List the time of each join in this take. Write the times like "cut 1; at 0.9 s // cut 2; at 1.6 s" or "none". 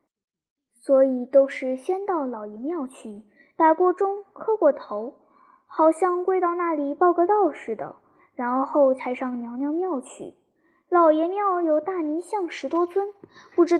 none